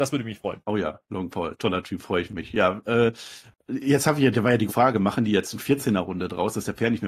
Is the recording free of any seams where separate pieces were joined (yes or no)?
no